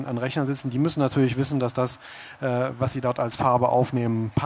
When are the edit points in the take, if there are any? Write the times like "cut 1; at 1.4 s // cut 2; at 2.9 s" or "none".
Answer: none